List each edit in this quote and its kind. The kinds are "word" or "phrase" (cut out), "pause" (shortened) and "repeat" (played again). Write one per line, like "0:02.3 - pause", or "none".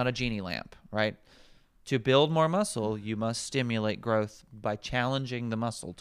none